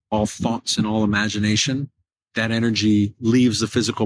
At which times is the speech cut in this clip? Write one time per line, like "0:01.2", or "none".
none

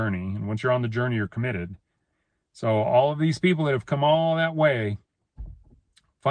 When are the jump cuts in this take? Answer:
none

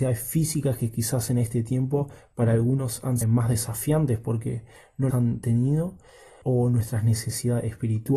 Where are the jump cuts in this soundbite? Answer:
0:03.2
0:05.1
0:06.4

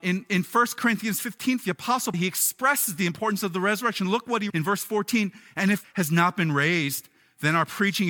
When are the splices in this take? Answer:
0:01.6
0:02.1
0:04.5
0:05.8

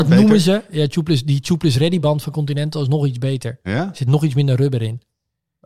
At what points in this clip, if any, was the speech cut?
none

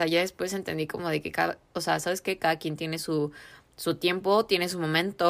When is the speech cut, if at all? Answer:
none

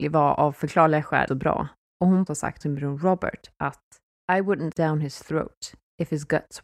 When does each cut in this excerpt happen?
0:01.3
0:02.3
0:02.6
0:04.7

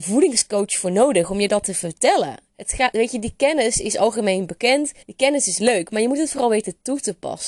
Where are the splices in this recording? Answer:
0:05.0

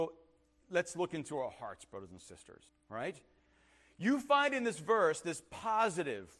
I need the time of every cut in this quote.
0:02.7

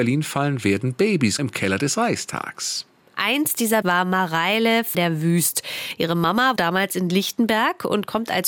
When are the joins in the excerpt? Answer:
0:01.4
0:03.8
0:04.9
0:06.6

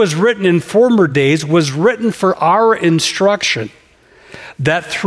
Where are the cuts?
none

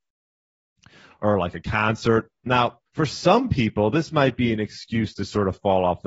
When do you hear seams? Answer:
0:02.9

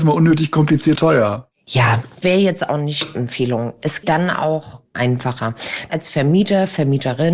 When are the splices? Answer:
0:01.0
0:02.2
0:03.2
0:04.0
0:04.9
0:05.9

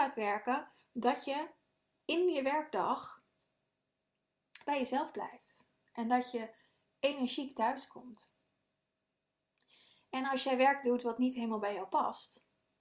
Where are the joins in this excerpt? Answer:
none

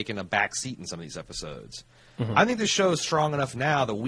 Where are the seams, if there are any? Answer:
none

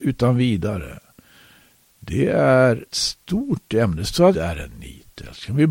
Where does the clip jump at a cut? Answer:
0:02.9
0:04.3

